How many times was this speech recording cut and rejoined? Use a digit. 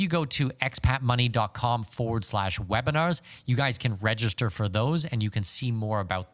0